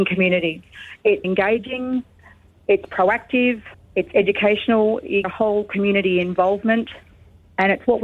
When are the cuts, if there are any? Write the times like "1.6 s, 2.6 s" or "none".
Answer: 1.2 s, 3.7 s, 5.2 s